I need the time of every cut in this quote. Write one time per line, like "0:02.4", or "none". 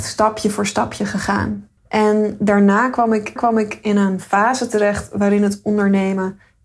0:01.8
0:03.4